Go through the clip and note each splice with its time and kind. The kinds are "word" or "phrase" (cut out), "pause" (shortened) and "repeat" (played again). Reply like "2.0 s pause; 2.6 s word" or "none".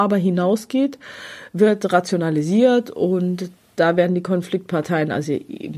none